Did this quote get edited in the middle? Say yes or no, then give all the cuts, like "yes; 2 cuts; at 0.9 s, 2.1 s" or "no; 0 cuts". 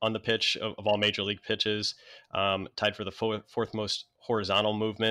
no; 0 cuts